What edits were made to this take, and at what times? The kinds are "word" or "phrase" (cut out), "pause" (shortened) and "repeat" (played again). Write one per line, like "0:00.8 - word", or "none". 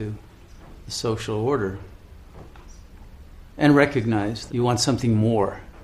0:03.5 - pause
0:04.5 - word